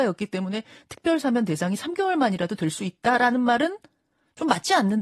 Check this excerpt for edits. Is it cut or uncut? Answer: uncut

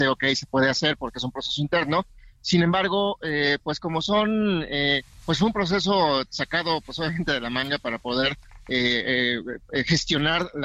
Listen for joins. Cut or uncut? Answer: uncut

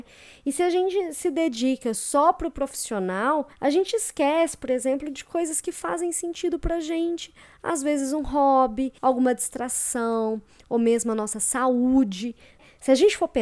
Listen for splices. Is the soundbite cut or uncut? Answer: cut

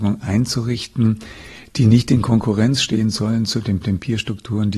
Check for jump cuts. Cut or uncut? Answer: cut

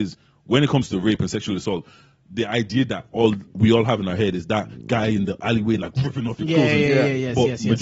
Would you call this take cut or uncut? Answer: uncut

